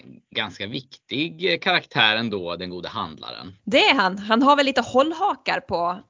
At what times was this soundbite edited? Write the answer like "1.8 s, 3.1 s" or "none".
3.6 s